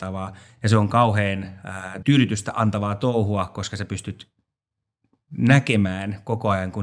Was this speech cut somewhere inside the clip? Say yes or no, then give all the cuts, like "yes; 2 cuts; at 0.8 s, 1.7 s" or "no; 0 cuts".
yes; 1 cut; at 2.0 s